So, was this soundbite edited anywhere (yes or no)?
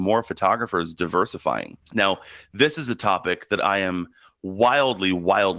no